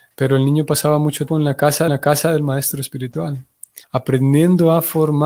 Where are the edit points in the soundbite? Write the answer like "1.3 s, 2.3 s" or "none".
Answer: 1.3 s, 1.9 s, 3.8 s